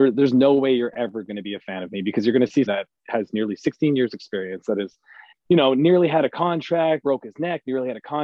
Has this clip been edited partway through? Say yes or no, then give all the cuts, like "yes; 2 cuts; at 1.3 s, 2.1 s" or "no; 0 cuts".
yes; 3 cuts; at 2.7 s, 5.3 s, 7.0 s